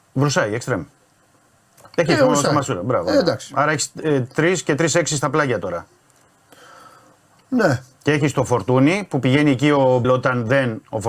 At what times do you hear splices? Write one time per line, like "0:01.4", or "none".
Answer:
0:10.0